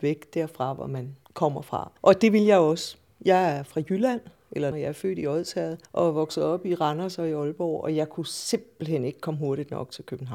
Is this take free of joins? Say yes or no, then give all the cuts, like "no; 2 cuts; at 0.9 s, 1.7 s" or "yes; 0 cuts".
no; 4 cuts; at 1.2 s, 2.0 s, 4.7 s, 5.9 s